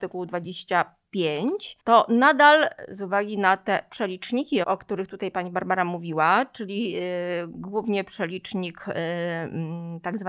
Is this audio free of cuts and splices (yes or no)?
no